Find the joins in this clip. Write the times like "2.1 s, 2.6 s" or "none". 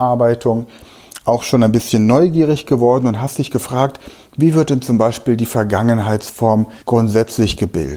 6.8 s